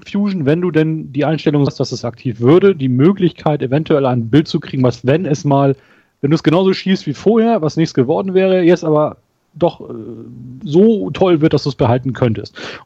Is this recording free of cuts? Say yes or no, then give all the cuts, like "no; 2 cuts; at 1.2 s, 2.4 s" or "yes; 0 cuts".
no; 1 cut; at 1.7 s